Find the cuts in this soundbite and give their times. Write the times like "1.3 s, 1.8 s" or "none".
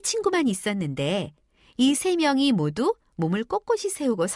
none